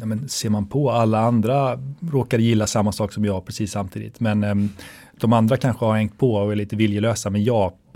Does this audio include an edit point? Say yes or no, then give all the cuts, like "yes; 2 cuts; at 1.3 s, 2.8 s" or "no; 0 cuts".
no; 0 cuts